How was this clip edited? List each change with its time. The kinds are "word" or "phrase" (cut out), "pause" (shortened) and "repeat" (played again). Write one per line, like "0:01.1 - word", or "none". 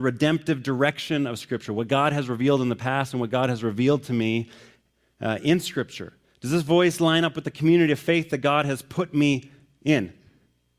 none